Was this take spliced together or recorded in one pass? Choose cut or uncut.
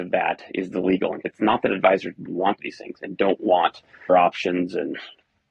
cut